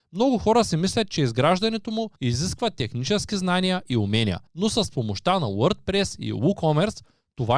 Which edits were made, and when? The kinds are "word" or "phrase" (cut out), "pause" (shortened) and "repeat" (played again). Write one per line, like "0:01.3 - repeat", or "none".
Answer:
0:02.2 - pause
0:04.5 - pause

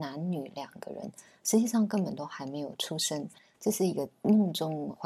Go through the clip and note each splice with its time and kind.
none

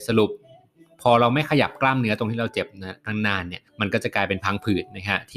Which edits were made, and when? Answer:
0:03.7 - pause

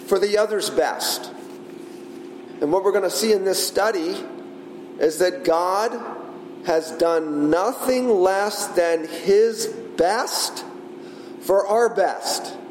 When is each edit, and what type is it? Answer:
none

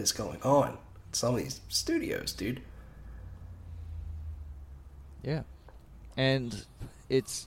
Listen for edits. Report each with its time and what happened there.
0:06.1 - word

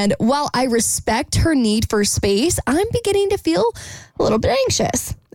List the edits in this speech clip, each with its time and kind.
none

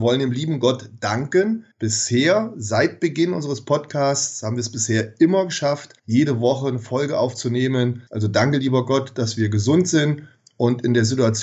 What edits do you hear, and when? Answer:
0:01.7 - pause
0:06.0 - pause
0:08.1 - pause

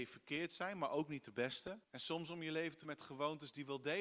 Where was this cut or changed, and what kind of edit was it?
0:01.8 - pause
0:02.8 - word

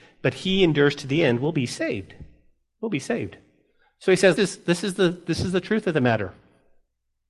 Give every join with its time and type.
0:04.4 - phrase

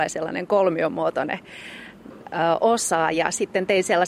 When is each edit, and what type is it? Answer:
none

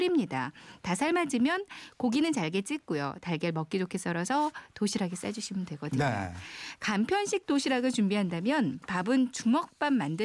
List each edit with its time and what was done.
none

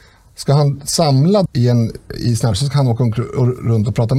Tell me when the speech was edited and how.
0:01.5 - word
0:02.5 - word

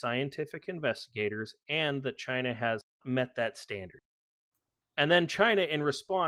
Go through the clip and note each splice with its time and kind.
0:03.0 - word

